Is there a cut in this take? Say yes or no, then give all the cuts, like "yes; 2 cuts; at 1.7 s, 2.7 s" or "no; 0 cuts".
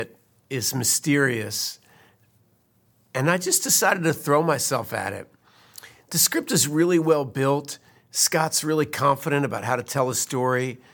no; 0 cuts